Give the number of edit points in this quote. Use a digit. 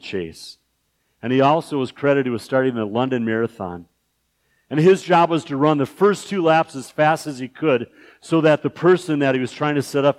0